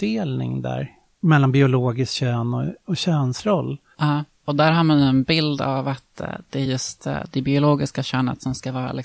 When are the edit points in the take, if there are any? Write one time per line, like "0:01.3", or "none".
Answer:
none